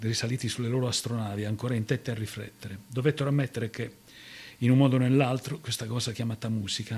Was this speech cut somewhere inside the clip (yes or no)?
no